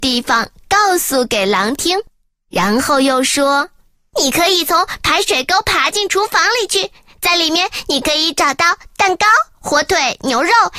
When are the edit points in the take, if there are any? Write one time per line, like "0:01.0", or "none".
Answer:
none